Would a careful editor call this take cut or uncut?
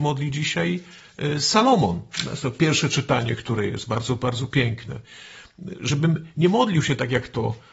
uncut